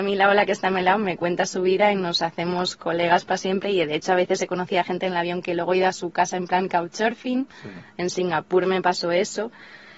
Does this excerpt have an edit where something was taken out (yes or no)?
no